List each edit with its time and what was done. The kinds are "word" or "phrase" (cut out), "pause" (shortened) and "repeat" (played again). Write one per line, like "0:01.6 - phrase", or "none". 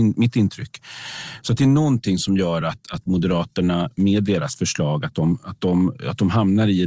none